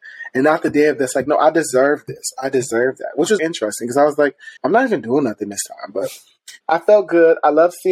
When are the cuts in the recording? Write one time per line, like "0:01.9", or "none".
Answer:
0:03.4
0:04.6
0:06.6